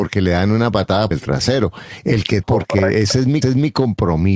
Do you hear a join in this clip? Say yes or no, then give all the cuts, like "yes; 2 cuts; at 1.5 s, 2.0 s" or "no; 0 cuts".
yes; 3 cuts; at 1.1 s, 2.4 s, 3.4 s